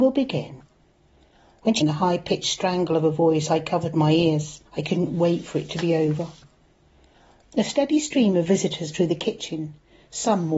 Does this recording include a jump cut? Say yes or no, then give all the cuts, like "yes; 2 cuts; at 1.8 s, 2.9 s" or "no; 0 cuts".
yes; 3 cuts; at 1.8 s, 4.6 s, 8.9 s